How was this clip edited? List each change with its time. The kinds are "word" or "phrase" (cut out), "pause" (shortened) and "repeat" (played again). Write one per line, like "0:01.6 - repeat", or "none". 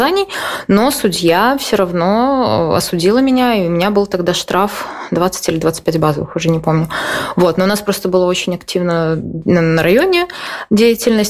none